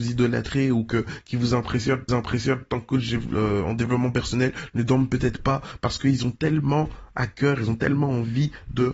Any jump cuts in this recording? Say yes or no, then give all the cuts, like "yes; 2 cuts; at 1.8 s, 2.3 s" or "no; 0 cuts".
yes; 1 cut; at 2.1 s